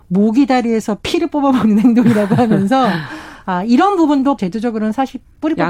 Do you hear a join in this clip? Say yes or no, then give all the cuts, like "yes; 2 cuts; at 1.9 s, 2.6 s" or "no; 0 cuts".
yes; 1 cut; at 4.4 s